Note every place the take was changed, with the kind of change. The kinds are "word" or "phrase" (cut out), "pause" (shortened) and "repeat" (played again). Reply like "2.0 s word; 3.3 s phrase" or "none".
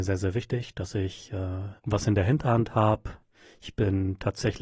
1.8 s pause